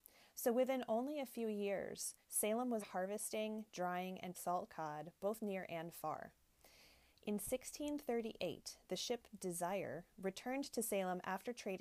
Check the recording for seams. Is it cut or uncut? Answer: cut